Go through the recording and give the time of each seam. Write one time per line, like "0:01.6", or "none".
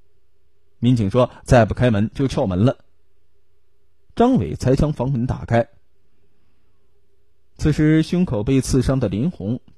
none